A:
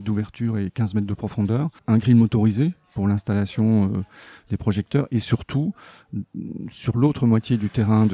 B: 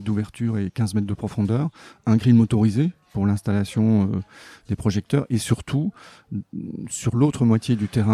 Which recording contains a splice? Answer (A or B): A